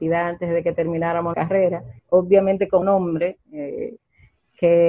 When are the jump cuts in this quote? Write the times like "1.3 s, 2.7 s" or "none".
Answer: 1.3 s, 2.0 s, 2.8 s